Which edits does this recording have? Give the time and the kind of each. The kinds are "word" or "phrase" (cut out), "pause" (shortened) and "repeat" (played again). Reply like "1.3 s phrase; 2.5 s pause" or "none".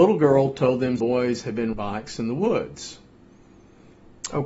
1.0 s word; 1.7 s word